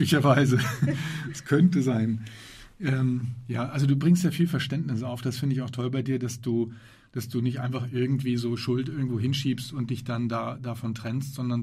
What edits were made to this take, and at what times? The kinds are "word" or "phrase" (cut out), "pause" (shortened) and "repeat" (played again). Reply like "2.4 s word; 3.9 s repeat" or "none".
none